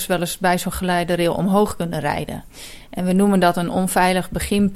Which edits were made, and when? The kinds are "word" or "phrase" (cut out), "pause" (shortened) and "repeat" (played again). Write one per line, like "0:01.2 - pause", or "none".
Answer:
none